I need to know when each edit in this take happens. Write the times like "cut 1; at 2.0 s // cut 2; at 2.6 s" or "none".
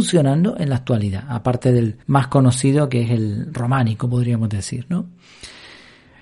cut 1; at 2.0 s